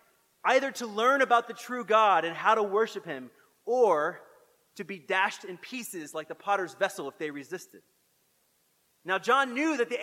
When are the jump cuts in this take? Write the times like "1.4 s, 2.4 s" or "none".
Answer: none